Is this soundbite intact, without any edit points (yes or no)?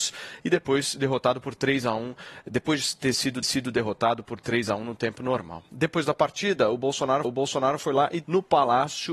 no